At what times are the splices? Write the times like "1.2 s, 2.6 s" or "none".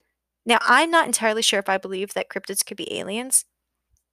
none